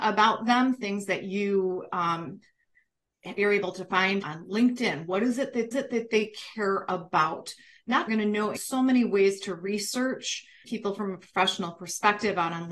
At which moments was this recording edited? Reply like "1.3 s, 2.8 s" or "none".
3.4 s, 4.2 s, 5.7 s, 8.1 s, 8.6 s, 10.6 s